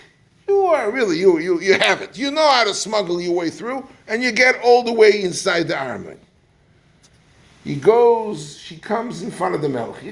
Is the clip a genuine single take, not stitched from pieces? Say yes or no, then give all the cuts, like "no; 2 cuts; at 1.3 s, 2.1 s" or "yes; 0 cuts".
yes; 0 cuts